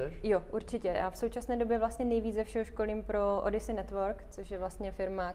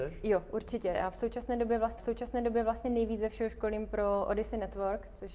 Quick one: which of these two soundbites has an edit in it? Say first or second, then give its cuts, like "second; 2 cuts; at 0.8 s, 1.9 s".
second; 1 cut; at 2.0 s